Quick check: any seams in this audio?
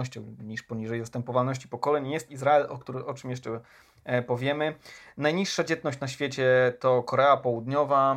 no; 0 cuts

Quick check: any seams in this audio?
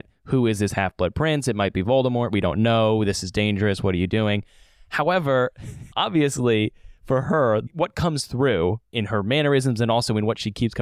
yes; 1 cut; at 5.9 s

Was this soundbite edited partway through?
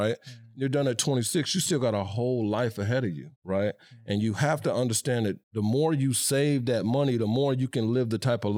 yes; 2 cuts; at 3.4 s, 5.4 s

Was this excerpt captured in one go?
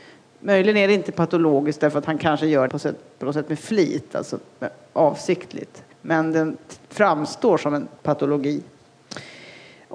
no; 4 cuts; at 2.7 s, 5.9 s, 6.8 s, 8.0 s

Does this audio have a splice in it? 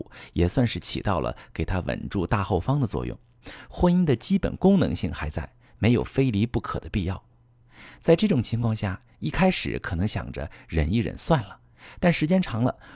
no; 0 cuts

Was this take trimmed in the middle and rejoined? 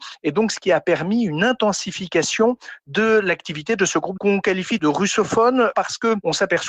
yes; 1 cut; at 4.2 s

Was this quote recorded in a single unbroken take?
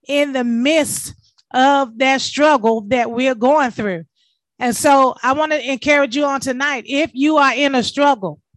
yes; 0 cuts

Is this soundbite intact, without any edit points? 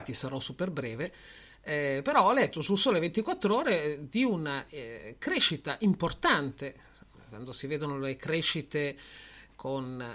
yes; 0 cuts

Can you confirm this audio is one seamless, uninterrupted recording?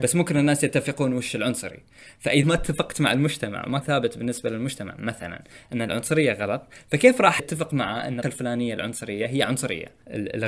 no; 4 cuts; at 2.4 s, 3.8 s, 7.4 s, 8.2 s

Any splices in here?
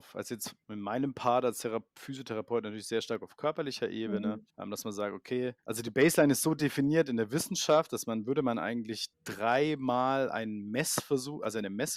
yes; 3 cuts; at 4.5 s, 5.6 s, 9.1 s

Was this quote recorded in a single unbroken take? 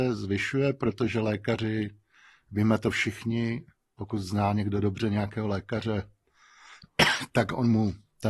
yes; 0 cuts

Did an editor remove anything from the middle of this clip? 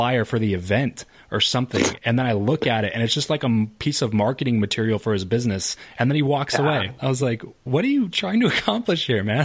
no; 0 cuts

